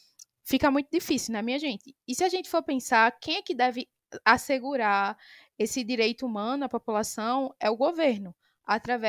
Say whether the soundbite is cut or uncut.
uncut